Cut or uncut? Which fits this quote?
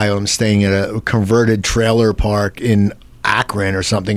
uncut